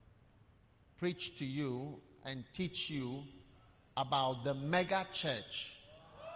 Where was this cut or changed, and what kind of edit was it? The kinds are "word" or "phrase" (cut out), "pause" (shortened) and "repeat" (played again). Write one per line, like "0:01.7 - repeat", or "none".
none